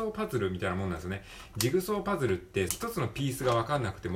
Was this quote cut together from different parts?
yes; 1 cut; at 2.7 s

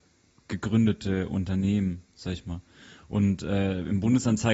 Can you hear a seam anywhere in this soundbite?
no; 0 cuts

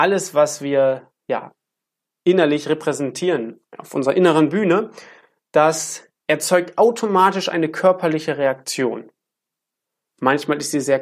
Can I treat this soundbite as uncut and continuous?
yes; 0 cuts

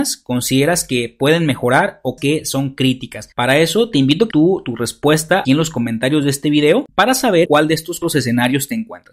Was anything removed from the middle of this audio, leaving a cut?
yes; 6 cuts; at 2.2 s, 3.3 s, 4.3 s, 5.4 s, 7.4 s, 8.0 s

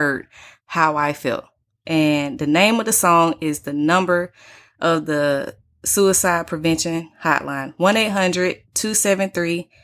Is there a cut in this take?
no; 0 cuts

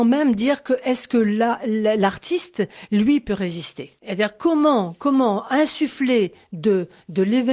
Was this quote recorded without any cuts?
no; 1 cut; at 4.0 s

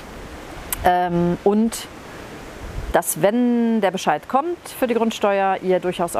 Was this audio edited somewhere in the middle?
yes; 1 cut; at 2.9 s

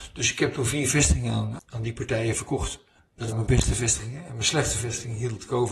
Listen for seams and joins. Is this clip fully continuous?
no; 2 cuts; at 1.6 s, 3.3 s

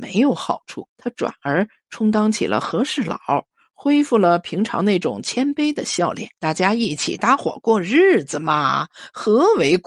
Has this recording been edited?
yes; 2 cuts; at 0.9 s, 6.4 s

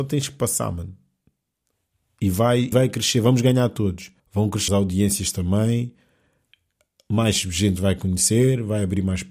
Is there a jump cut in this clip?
yes; 3 cuts; at 2.7 s, 4.2 s, 4.7 s

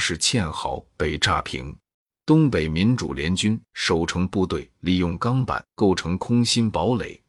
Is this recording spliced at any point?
yes; 1 cut; at 1.9 s

